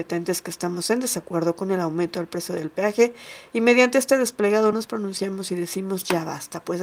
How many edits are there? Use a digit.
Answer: 0